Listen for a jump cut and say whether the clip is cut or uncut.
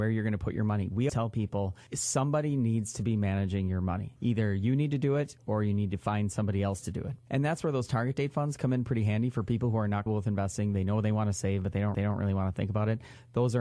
cut